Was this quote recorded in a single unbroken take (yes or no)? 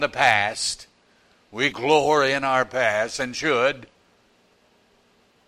no